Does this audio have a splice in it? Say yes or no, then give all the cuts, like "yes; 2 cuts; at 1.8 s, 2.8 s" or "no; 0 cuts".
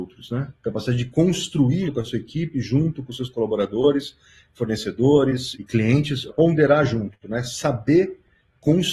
yes; 3 cuts; at 1.8 s, 5.5 s, 6.3 s